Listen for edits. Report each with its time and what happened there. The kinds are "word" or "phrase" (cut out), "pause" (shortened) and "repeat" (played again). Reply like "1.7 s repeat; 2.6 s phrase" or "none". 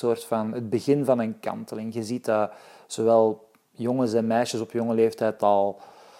none